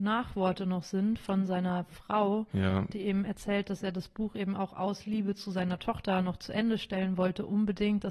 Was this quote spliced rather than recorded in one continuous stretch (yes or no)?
no